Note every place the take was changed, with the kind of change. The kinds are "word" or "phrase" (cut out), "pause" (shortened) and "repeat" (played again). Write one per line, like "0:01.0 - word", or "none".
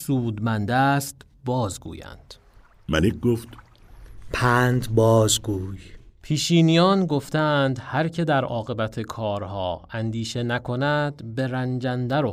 none